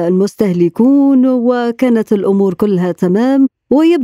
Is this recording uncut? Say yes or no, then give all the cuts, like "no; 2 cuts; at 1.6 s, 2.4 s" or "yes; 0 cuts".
yes; 0 cuts